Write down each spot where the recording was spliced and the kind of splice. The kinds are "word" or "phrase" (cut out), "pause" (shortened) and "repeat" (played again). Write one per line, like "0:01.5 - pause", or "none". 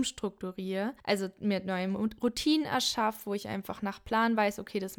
0:01.0 - pause